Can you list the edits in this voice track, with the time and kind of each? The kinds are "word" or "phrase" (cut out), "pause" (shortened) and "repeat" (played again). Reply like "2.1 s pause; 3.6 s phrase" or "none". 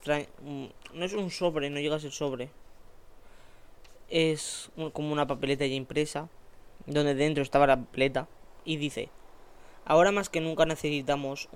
none